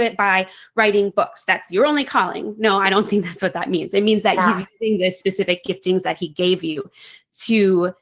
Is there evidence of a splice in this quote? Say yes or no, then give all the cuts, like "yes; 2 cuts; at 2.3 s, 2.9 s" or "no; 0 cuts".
no; 0 cuts